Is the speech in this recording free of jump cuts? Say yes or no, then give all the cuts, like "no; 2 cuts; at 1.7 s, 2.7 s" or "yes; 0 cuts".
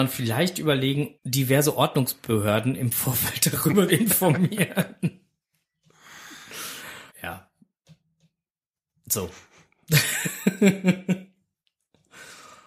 no; 3 cuts; at 1.2 s, 3.9 s, 7.1 s